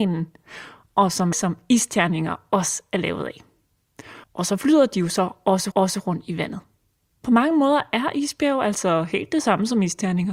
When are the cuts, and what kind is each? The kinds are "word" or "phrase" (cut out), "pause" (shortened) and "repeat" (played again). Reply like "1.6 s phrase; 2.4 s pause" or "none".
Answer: 1.3 s phrase; 4.2 s pause; 5.7 s repeat